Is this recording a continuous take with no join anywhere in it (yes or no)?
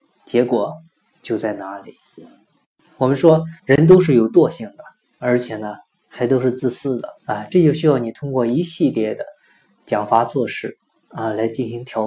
no